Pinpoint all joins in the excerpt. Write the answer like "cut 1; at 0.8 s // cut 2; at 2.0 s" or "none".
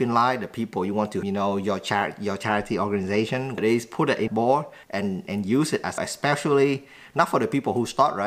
cut 1; at 1.2 s // cut 2; at 3.6 s // cut 3; at 4.3 s // cut 4; at 4.8 s // cut 5; at 6.0 s